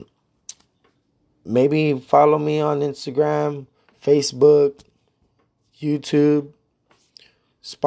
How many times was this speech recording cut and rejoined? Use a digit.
0